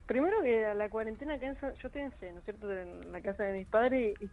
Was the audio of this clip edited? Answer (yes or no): yes